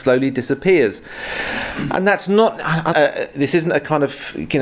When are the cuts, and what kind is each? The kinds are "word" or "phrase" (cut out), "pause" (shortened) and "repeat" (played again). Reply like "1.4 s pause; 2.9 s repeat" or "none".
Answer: 2.9 s phrase